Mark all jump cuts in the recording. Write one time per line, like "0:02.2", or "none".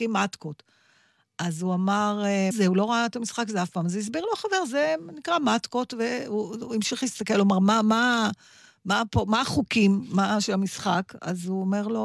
0:02.5